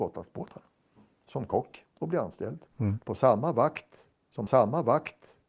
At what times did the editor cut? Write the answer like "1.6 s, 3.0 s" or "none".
1.9 s, 4.5 s